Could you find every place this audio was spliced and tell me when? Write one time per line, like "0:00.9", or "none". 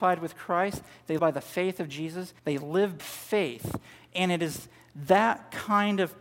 0:01.2
0:02.4
0:03.0